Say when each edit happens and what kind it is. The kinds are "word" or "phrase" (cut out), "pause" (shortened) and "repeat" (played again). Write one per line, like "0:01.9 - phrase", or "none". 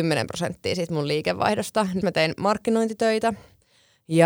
0:02.0 - word